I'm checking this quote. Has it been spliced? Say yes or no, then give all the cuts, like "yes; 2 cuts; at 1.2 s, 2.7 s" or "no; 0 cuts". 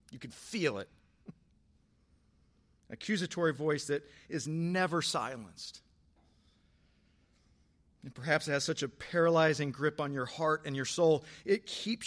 no; 0 cuts